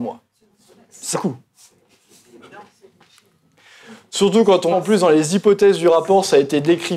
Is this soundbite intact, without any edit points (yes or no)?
no